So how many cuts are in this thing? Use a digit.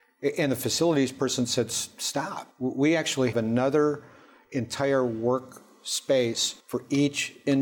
3